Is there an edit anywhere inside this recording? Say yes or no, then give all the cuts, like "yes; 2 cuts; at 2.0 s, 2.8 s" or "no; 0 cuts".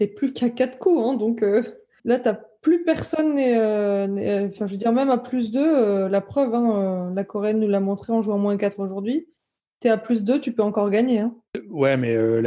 no; 0 cuts